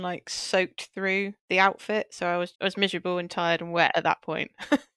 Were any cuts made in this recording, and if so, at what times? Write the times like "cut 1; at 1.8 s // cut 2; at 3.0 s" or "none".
cut 1; at 1.4 s // cut 2; at 2.5 s